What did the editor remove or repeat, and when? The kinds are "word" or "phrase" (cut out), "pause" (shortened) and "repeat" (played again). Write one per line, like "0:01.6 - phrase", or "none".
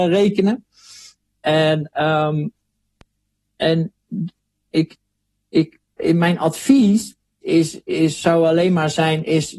0:03.5 - word
0:05.9 - word
0:07.4 - word